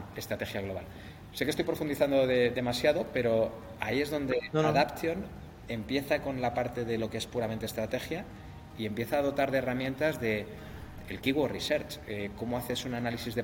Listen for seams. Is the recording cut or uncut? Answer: uncut